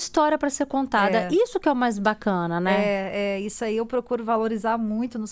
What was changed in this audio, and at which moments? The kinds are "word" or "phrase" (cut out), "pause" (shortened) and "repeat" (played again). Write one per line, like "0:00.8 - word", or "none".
none